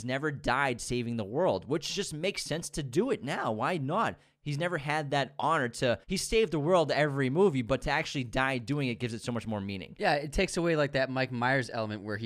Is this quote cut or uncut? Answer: cut